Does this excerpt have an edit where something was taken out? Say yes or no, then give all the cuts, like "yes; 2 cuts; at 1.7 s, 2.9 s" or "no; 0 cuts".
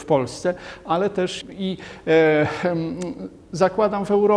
yes; 1 cut; at 1.4 s